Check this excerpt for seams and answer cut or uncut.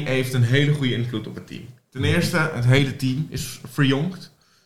uncut